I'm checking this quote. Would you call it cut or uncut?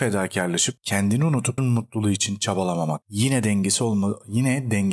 cut